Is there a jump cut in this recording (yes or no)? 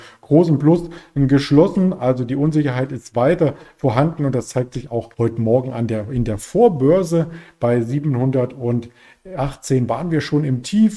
yes